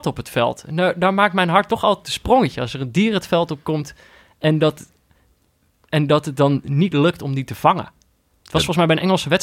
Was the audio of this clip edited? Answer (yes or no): no